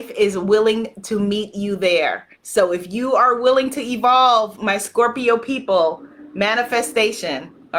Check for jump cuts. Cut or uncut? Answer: cut